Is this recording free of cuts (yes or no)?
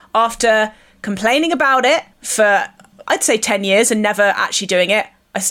no